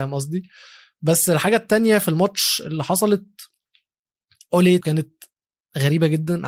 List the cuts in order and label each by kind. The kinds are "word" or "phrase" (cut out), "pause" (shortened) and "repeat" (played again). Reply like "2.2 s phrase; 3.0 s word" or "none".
4.8 s word